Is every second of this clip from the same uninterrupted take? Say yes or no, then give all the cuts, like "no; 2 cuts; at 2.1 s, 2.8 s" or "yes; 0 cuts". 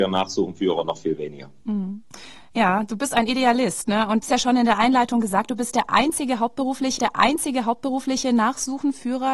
no; 2 cuts; at 4.2 s, 7.0 s